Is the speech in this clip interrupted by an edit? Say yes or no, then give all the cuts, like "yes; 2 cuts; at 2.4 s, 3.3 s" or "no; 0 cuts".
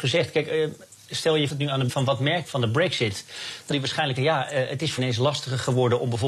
yes; 6 cuts; at 1.5 s, 1.9 s, 2.4 s, 3.7 s, 4.2 s, 5.0 s